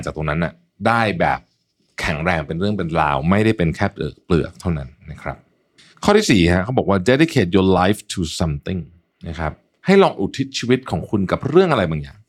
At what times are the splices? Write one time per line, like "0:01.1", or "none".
none